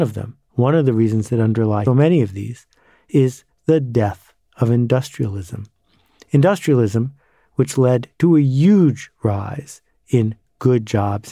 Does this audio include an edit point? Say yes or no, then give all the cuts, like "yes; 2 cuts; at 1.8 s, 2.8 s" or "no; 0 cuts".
yes; 1 cut; at 1.9 s